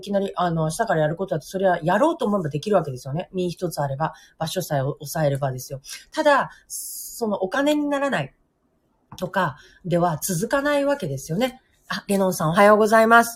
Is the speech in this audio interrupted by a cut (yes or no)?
no